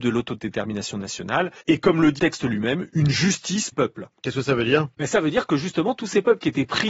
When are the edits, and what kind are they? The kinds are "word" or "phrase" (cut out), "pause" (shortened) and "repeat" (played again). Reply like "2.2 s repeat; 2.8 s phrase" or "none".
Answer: 1.6 s pause; 2.2 s word; 3.7 s phrase; 4.9 s pause